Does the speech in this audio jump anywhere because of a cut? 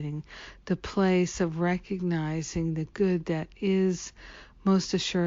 no; 0 cuts

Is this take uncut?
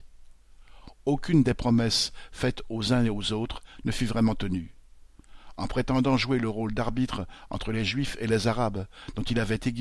yes; 0 cuts

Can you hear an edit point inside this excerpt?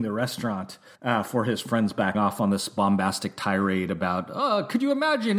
yes; 2 cuts; at 0.9 s, 2.1 s

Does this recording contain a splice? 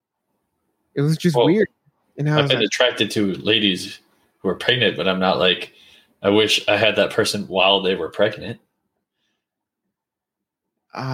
no; 0 cuts

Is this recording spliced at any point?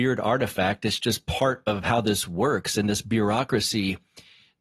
no; 0 cuts

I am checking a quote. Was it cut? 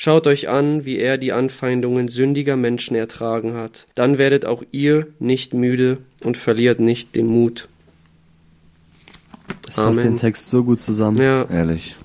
yes; 1 cut; at 3.9 s

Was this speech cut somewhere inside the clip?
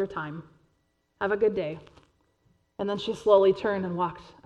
no; 0 cuts

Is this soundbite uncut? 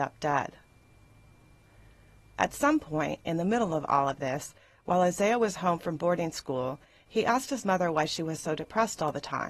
yes; 0 cuts

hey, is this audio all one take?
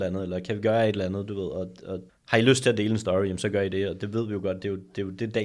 no; 1 cut; at 2.1 s

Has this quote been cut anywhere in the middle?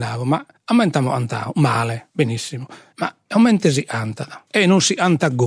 no; 0 cuts

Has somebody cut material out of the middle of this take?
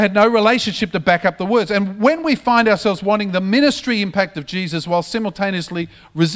no; 0 cuts

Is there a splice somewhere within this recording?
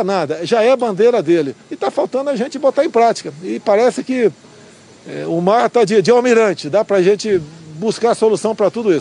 yes; 1 cut; at 1.6 s

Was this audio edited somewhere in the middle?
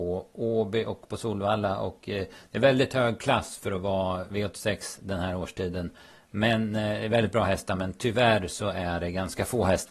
no; 0 cuts

